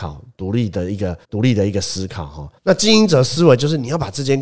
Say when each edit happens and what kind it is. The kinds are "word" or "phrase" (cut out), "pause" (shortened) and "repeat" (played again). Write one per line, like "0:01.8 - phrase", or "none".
0:01.2 - pause
0:02.6 - pause